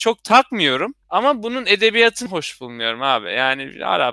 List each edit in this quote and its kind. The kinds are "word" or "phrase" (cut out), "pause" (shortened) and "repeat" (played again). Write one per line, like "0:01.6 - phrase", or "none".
0:01.0 - pause
0:02.3 - word